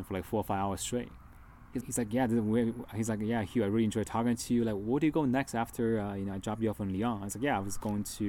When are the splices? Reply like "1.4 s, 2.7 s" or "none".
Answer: 1.8 s